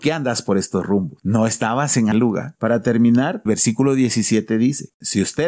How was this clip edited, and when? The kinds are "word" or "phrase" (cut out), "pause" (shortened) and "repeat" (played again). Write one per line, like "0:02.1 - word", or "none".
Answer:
0:02.1 - word
0:03.5 - word